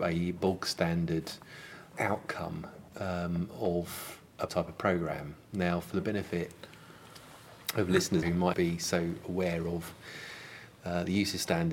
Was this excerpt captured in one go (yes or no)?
no